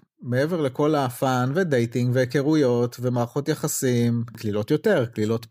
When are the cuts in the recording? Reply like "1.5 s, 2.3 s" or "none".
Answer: none